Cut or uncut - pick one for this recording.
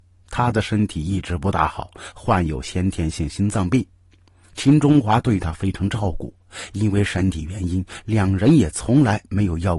uncut